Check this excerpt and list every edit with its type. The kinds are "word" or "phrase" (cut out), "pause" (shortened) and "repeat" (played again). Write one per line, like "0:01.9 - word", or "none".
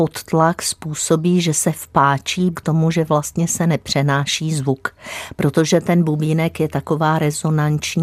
0:02.5 - phrase